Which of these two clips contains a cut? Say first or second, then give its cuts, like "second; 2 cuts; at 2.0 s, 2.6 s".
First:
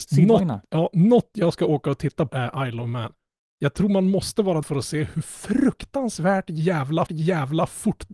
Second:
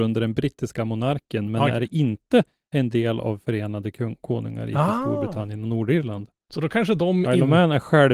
first; 3 cuts; at 2.3 s, 4.6 s, 7.1 s